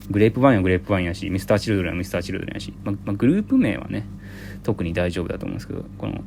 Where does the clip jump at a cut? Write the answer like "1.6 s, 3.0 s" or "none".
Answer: 3.0 s

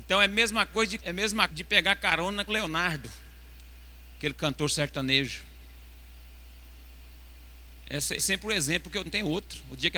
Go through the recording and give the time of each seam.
1.0 s, 1.5 s, 2.5 s, 8.2 s, 9.1 s

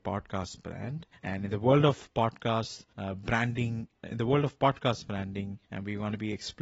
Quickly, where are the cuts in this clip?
1.1 s, 2.9 s, 5.6 s

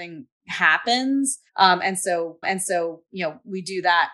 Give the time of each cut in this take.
1.5 s, 2.4 s

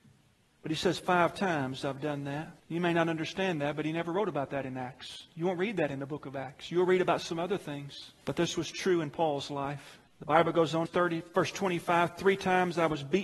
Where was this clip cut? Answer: 2.6 s, 8.2 s, 10.1 s, 10.9 s

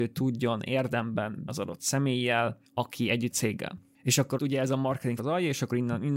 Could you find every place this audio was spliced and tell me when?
1.5 s, 2.7 s, 3.3 s, 4.4 s, 5.2 s

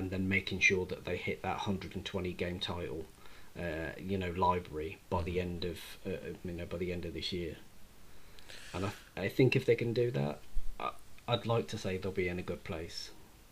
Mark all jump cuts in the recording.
none

